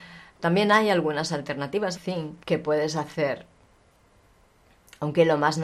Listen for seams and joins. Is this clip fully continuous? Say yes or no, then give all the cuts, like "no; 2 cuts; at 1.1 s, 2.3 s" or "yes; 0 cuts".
no; 2 cuts; at 1.9 s, 2.4 s